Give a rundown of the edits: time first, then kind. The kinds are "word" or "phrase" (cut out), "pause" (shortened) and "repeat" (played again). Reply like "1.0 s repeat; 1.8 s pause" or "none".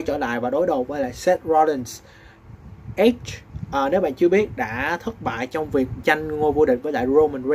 6.0 s word